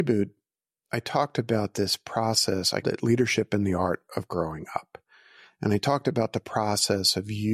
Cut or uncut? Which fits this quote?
cut